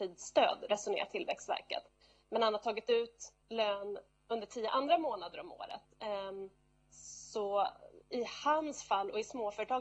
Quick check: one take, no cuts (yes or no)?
no